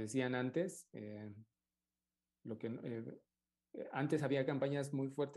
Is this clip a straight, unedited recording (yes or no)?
yes